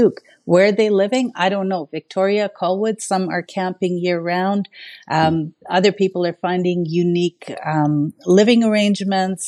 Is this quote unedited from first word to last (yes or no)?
yes